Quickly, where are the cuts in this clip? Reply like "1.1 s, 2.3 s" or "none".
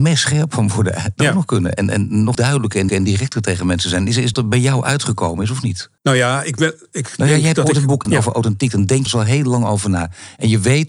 1.2 s, 2.3 s, 2.9 s, 4.3 s, 6.0 s, 8.0 s, 9.1 s